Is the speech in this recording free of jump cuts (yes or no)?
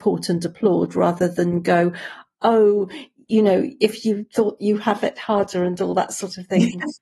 no